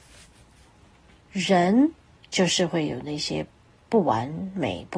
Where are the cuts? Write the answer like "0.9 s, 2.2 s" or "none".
2.1 s